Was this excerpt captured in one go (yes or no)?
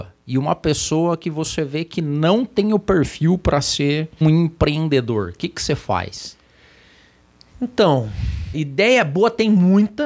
no